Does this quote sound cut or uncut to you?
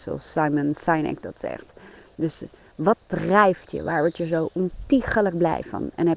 uncut